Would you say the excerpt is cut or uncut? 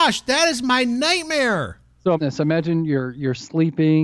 cut